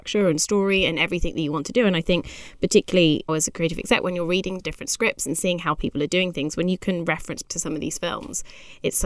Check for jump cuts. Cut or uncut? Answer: cut